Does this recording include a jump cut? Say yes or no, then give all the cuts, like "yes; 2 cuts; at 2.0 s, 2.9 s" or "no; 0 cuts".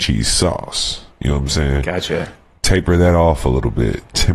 no; 0 cuts